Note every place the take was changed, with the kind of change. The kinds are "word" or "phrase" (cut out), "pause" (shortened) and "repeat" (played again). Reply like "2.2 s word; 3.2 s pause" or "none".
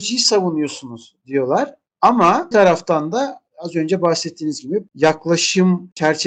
2.5 s word; 4.9 s word